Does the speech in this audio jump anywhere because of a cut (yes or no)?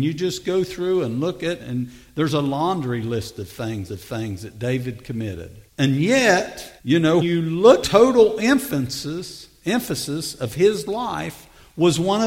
yes